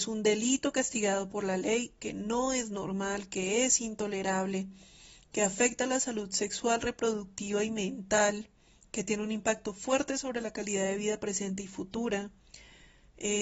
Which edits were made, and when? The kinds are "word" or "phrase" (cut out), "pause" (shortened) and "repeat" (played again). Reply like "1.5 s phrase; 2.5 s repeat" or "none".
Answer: none

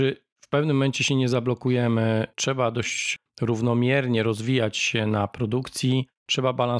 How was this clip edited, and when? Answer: none

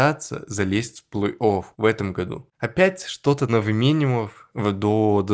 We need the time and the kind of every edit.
1.7 s pause; 2.5 s pause; 3.5 s word

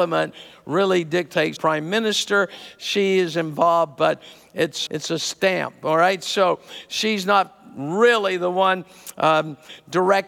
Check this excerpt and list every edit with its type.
1.6 s phrase; 4.9 s word

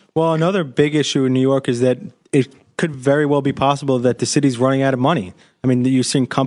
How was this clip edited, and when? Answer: none

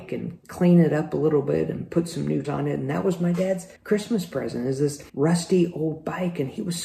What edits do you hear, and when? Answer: 2.4 s word; 3.8 s pause; 5.1 s pause

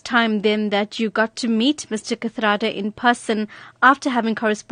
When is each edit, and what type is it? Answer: none

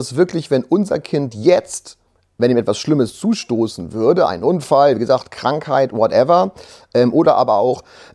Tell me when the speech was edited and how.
2.1 s pause

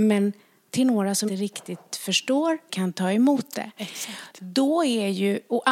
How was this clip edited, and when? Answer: 1.3 s word; 2.7 s word

